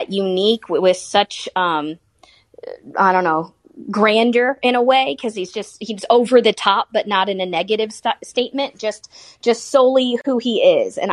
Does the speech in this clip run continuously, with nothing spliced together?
yes; 0 cuts

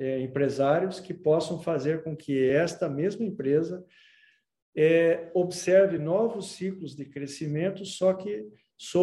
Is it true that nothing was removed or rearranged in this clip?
yes; 0 cuts

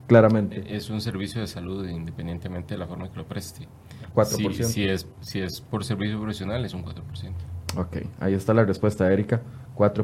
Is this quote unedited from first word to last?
yes; 0 cuts

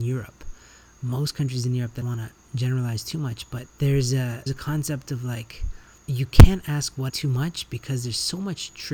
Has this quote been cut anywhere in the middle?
yes; 5 cuts; at 2.0 s, 3.7 s, 4.5 s, 6.0 s, 7.1 s

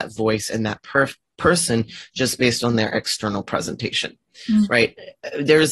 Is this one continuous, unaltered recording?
yes; 0 cuts

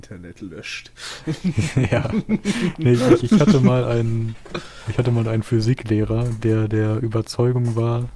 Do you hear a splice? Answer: no; 0 cuts

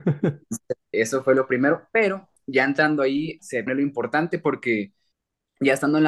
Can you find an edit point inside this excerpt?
yes; 4 cuts; at 0.9 s, 2.4 s, 3.7 s, 5.1 s

